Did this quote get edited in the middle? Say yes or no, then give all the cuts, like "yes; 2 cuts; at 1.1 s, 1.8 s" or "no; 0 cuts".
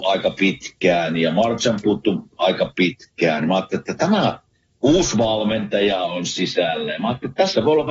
no; 0 cuts